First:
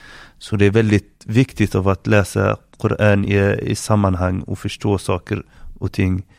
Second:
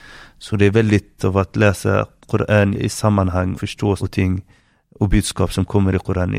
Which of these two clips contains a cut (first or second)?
second